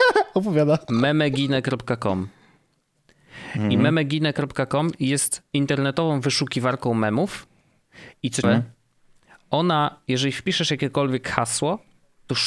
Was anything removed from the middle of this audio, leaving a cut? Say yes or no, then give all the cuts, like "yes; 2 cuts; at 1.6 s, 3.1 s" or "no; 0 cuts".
yes; 2 cuts; at 5.5 s, 8.4 s